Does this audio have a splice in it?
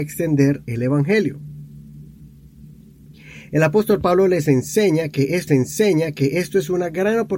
yes; 1 cut; at 5.5 s

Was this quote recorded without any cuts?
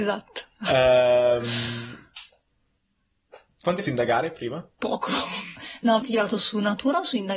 no; 2 cuts; at 3.8 s, 6.0 s

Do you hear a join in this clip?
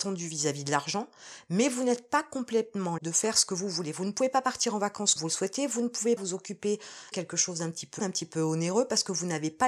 yes; 5 cuts; at 3.0 s, 5.2 s, 6.2 s, 7.1 s, 8.0 s

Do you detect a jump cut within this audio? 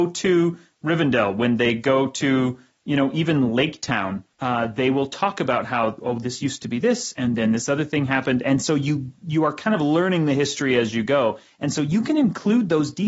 yes; 2 cuts; at 4.3 s, 9.2 s

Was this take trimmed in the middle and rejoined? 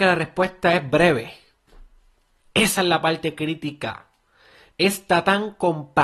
no; 0 cuts

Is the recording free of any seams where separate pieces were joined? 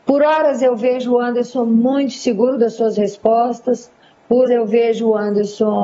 no; 1 cut; at 4.5 s

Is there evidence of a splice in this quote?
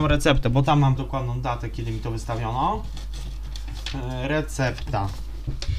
yes; 1 cut; at 1.0 s

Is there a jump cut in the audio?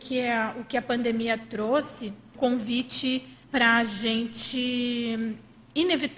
yes; 2 cuts; at 2.3 s, 3.4 s

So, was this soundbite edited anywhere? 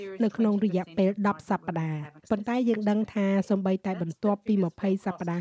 yes; 1 cut; at 2.2 s

